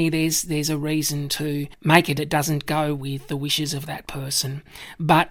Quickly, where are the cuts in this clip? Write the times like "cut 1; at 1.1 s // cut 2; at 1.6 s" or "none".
cut 1; at 2.2 s // cut 2; at 2.7 s